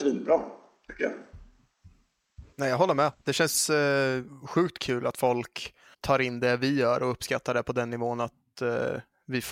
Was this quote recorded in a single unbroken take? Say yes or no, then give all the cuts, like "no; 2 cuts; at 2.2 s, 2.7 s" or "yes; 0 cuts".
no; 2 cuts; at 2.5 s, 5.9 s